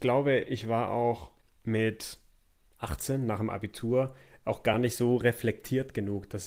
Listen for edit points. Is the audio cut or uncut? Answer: uncut